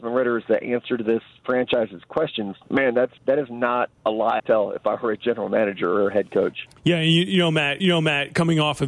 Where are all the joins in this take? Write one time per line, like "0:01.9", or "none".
0:02.6
0:03.2
0:04.0
0:04.4
0:06.8
0:07.8